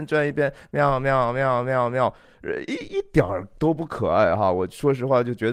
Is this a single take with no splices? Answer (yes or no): yes